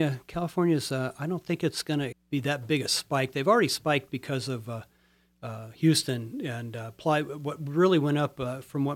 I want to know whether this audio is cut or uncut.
cut